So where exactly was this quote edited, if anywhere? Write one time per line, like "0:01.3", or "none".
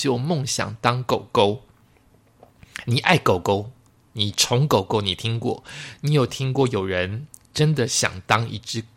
none